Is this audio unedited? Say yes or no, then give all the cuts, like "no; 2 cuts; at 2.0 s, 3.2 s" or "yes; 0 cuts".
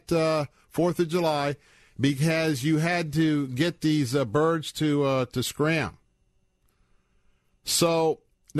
yes; 0 cuts